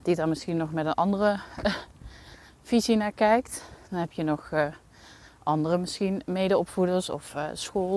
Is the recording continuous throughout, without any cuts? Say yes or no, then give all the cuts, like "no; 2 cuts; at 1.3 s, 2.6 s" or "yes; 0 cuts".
yes; 0 cuts